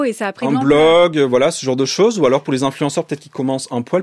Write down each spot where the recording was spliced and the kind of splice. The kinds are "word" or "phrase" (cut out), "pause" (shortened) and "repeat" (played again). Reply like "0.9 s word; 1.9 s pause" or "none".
none